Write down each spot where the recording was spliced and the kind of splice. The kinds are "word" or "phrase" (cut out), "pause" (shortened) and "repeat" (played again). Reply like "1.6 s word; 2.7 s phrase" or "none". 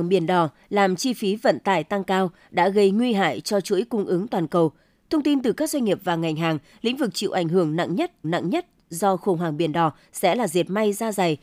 8.2 s repeat